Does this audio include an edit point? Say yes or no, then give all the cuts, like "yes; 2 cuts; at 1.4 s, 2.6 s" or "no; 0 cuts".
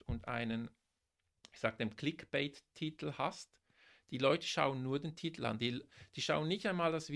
no; 0 cuts